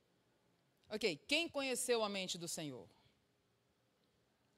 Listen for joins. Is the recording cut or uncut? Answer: uncut